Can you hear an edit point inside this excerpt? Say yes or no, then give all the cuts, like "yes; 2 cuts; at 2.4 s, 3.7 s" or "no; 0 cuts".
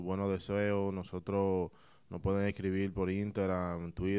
no; 0 cuts